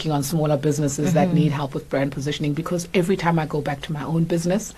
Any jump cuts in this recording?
no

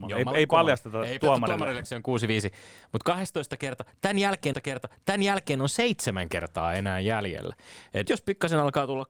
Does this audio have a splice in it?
yes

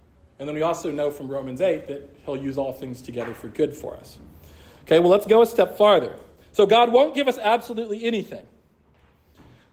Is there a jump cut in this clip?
no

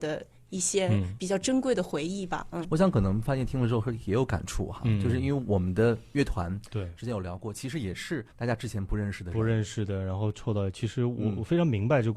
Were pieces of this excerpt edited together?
yes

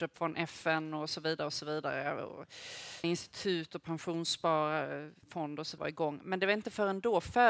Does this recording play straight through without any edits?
no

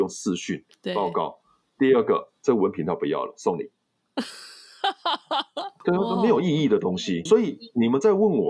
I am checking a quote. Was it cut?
yes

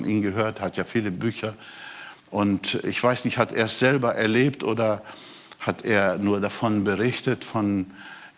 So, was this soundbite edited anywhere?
yes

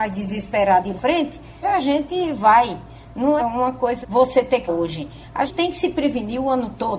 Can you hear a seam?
yes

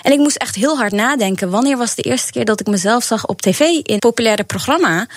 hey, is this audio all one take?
no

